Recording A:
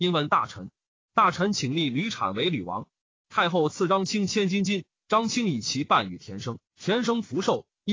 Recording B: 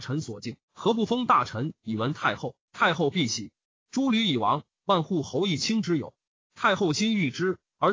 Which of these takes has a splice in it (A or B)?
A